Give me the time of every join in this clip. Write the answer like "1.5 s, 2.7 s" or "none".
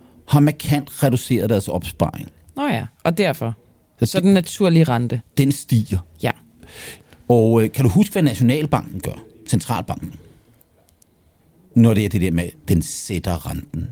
none

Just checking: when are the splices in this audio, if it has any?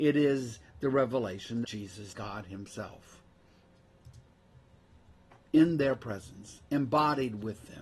1.6 s, 2.1 s

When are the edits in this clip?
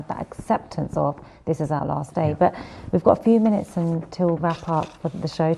4.4 s

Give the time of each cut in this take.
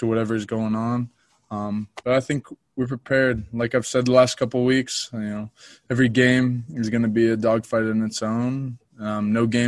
none

